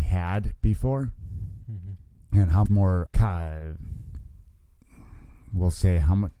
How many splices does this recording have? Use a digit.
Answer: 2